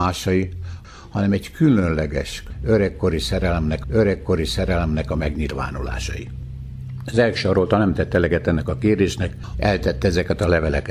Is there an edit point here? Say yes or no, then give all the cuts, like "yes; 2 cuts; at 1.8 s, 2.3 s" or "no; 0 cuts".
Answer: yes; 2 cuts; at 3.8 s, 9.5 s